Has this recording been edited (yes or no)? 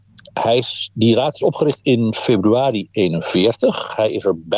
no